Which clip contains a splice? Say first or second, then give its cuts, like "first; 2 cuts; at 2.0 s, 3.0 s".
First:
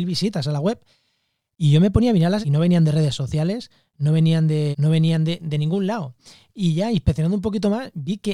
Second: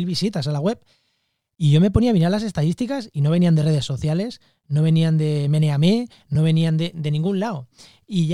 first; 2 cuts; at 2.4 s, 4.7 s